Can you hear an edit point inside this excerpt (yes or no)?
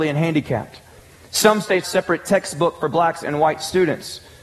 yes